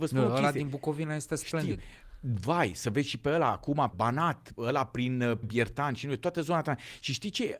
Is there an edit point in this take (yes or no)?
yes